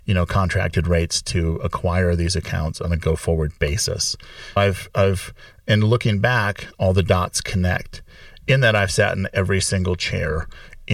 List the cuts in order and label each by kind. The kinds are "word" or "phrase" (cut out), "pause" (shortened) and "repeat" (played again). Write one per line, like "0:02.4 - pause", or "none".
0:04.6 - word